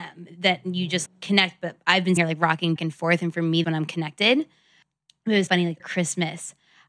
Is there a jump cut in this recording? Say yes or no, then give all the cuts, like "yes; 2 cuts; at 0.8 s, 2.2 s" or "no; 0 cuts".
yes; 6 cuts; at 1.1 s, 2.2 s, 2.8 s, 3.6 s, 5.5 s, 5.8 s